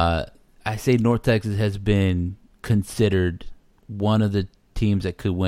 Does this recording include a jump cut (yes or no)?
no